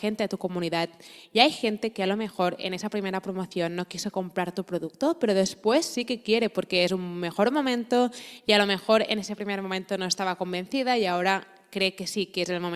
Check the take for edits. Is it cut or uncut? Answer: uncut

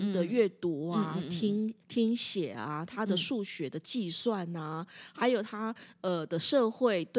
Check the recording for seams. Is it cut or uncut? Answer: cut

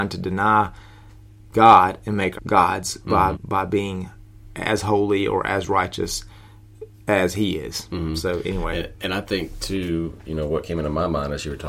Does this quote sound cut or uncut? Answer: cut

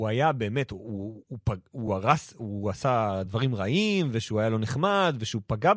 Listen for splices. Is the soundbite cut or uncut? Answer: uncut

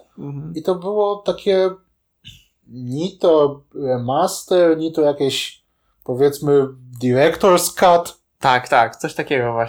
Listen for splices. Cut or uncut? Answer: uncut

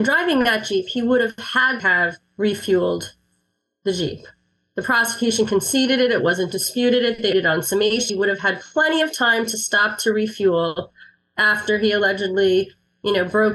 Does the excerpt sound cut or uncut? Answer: cut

